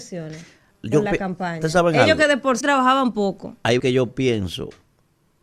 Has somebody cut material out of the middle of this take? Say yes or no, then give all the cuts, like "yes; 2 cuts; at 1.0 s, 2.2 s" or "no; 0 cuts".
yes; 2 cuts; at 2.6 s, 3.8 s